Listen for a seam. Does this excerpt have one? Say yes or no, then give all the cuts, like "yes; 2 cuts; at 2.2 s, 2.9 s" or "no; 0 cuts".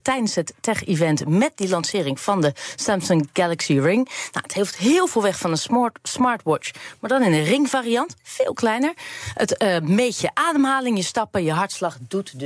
no; 0 cuts